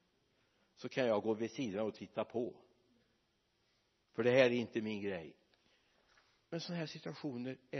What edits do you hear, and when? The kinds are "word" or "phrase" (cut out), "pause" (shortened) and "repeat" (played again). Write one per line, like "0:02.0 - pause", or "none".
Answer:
none